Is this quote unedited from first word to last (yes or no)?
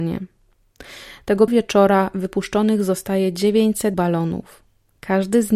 no